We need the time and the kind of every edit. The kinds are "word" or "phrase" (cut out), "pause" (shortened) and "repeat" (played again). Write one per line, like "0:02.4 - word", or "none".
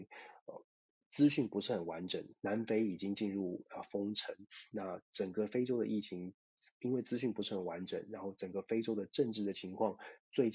0:04.7 - word